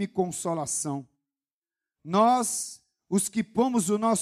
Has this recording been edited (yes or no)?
no